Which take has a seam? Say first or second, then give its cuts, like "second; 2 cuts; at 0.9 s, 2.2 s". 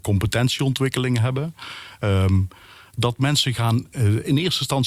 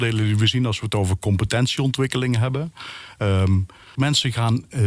second; 1 cut; at 3.9 s